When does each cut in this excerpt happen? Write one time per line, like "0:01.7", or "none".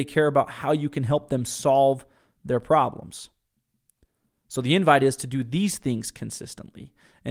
none